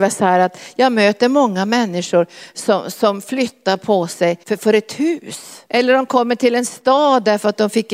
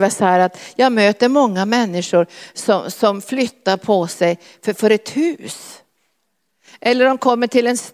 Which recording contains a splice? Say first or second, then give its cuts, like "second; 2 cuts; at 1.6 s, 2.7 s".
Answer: first; 2 cuts; at 4.4 s, 5.7 s